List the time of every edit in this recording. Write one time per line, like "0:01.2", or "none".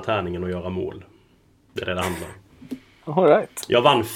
none